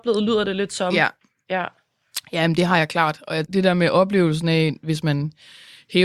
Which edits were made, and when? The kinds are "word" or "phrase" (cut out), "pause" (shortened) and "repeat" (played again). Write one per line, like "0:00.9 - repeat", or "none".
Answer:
0:03.5 - phrase